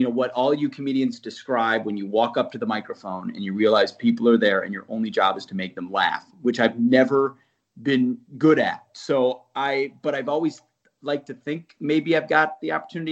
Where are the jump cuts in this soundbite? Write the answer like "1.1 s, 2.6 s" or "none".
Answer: none